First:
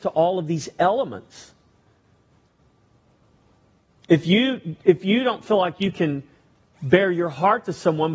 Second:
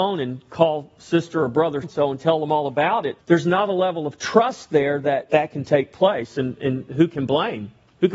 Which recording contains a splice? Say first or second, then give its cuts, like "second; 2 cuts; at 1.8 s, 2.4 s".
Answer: second; 3 cuts; at 1.8 s, 3.2 s, 5.3 s